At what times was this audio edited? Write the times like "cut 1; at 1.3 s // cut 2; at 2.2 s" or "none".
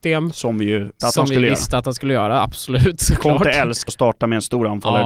cut 1; at 1.0 s // cut 2; at 3.9 s